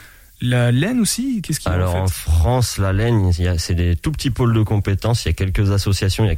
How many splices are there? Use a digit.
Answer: 0